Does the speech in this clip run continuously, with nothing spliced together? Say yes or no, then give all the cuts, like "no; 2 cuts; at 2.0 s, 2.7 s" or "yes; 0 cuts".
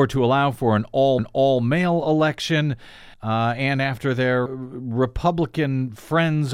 no; 3 cuts; at 1.2 s, 3.1 s, 4.5 s